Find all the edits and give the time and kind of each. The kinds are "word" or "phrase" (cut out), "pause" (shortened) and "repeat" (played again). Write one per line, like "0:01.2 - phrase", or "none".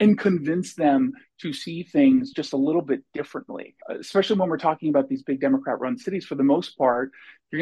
0:03.8 - pause